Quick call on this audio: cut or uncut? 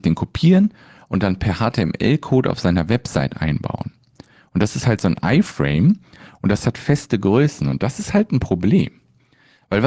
uncut